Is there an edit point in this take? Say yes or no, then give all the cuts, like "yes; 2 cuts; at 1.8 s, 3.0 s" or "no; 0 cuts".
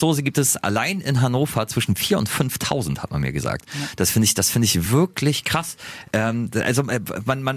no; 0 cuts